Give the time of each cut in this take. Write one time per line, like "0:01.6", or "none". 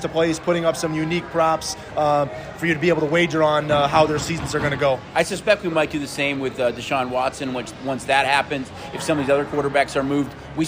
none